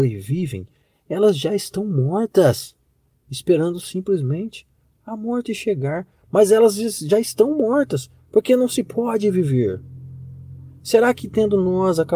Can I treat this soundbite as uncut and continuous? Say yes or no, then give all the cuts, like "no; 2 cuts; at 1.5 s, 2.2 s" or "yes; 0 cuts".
yes; 0 cuts